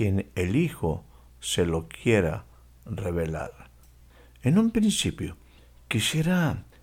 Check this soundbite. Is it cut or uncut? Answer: uncut